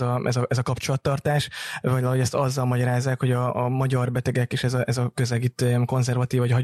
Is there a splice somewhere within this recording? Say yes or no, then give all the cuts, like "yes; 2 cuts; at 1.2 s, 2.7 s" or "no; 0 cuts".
no; 0 cuts